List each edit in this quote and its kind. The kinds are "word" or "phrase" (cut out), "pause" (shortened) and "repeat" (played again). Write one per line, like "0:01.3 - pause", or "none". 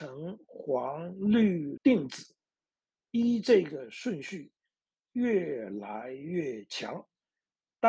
0:01.8 - word